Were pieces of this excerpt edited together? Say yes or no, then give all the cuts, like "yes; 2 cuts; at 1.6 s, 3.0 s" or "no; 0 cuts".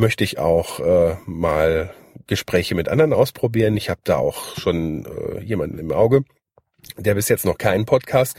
no; 0 cuts